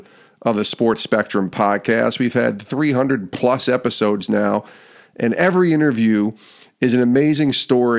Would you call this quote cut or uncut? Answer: uncut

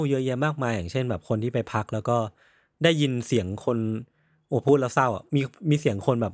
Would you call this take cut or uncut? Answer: uncut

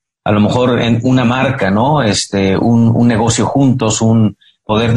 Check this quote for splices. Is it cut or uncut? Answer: uncut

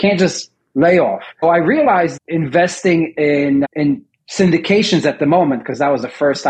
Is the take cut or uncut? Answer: cut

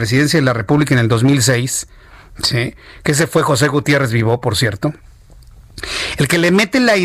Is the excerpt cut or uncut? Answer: uncut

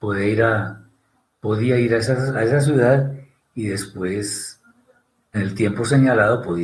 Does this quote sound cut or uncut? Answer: cut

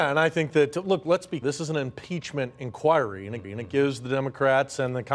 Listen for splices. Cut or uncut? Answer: cut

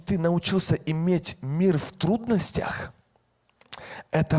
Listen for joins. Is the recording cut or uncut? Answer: uncut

